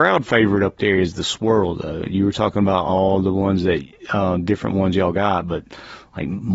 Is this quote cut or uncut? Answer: uncut